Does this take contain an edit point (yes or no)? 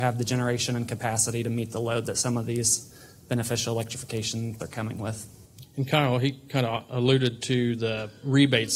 yes